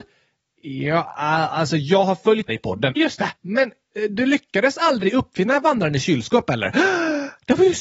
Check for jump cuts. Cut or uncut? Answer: cut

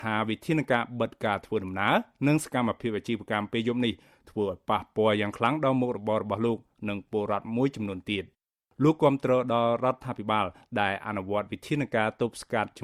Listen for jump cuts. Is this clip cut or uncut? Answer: uncut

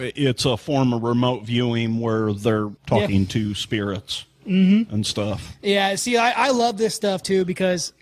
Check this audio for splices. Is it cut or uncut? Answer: cut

